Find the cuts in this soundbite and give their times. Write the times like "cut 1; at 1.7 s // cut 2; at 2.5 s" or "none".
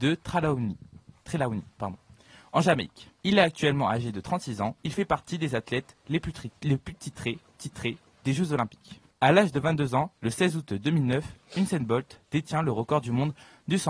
cut 1; at 3.2 s // cut 2; at 4.8 s // cut 3; at 6.6 s // cut 4; at 7.6 s // cut 5; at 9.1 s

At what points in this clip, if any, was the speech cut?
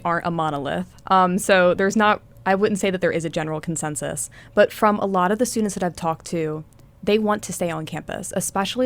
none

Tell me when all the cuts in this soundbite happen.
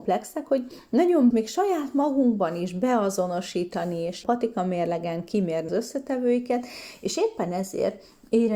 cut 1; at 1.3 s // cut 2; at 4.2 s // cut 3; at 5.7 s

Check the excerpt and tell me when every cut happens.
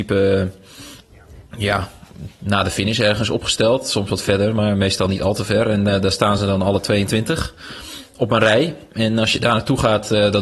none

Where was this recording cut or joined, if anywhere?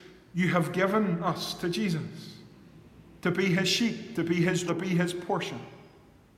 cut 1; at 4.7 s

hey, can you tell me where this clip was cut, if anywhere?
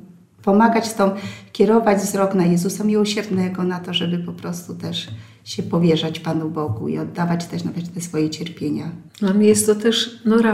cut 1; at 9.1 s

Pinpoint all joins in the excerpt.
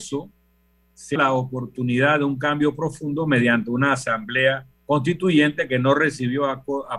cut 1; at 1.2 s // cut 2; at 4.7 s

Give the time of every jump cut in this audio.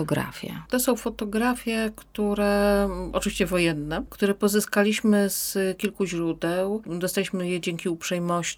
none

